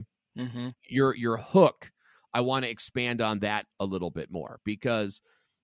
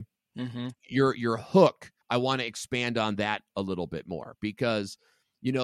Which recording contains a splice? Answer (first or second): second